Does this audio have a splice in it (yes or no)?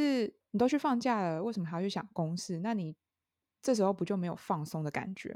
no